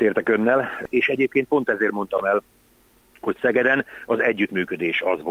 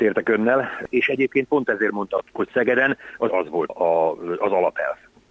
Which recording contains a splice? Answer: second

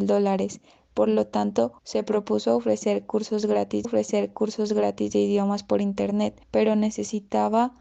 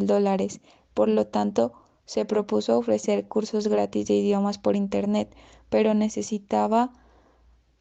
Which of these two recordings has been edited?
first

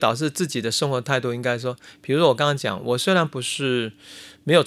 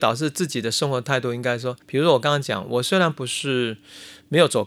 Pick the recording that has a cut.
second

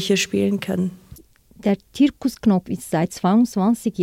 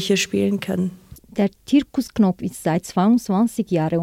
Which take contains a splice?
second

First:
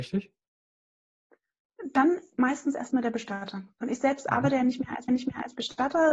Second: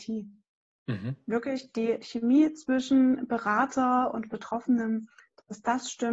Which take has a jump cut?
first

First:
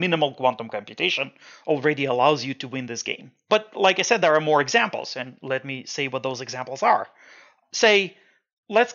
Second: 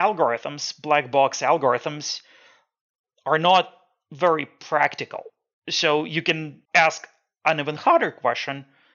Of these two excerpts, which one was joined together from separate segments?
second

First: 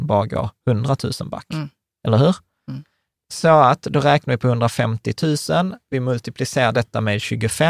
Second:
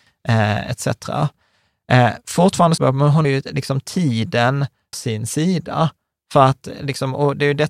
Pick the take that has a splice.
second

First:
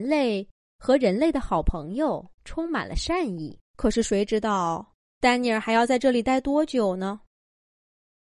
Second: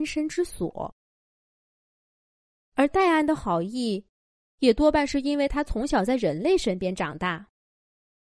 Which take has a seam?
first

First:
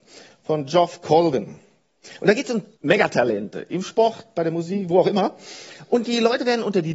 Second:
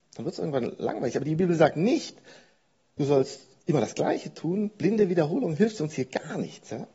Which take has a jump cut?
first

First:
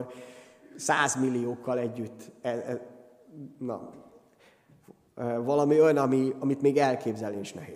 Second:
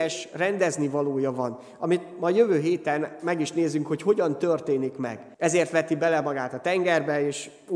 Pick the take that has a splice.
second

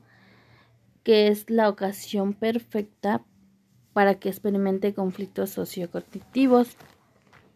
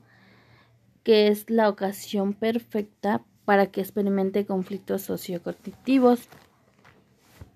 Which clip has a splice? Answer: second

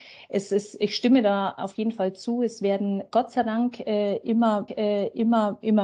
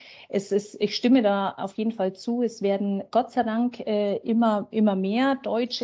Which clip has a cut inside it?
first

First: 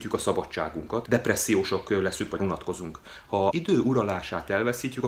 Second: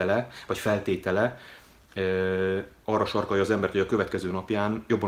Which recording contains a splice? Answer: first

